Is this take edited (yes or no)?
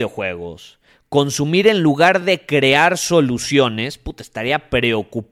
no